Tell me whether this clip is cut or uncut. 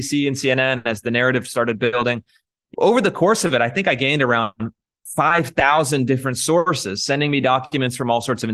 cut